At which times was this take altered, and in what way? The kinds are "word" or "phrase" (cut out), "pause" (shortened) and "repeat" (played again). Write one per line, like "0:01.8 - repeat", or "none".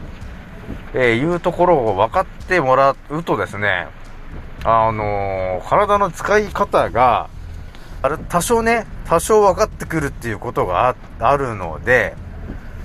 0:08.0 - phrase